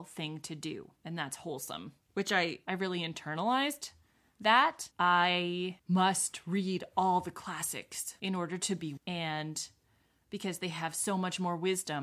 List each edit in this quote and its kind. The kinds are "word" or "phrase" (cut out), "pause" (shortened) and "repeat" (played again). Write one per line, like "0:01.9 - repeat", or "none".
0:01.0 - pause
0:09.0 - phrase